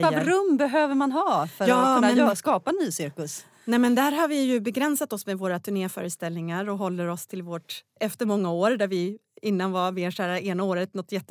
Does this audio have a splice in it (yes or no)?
no